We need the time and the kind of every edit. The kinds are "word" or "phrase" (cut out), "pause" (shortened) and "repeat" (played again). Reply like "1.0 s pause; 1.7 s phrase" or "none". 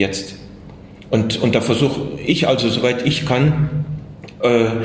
none